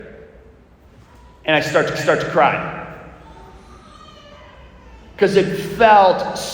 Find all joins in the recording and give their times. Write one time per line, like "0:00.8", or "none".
0:01.9